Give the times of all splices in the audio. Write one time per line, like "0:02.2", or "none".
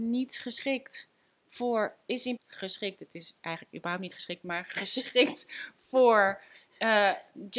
0:02.4